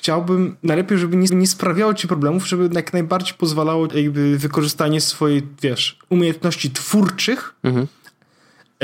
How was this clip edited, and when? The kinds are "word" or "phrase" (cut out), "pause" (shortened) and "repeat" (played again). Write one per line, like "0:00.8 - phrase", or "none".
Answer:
0:01.3 - repeat
0:03.9 - phrase